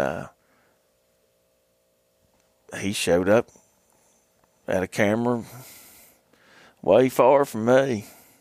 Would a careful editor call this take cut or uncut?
uncut